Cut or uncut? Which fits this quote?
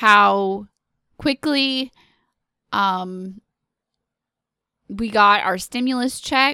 uncut